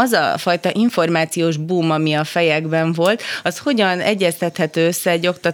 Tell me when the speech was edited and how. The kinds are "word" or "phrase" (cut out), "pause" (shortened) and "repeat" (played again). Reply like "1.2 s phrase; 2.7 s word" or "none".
none